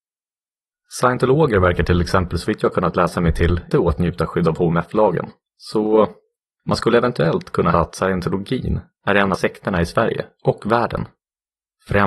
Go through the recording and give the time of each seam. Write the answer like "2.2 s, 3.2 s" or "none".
3.7 s, 5.4 s, 7.7 s, 9.3 s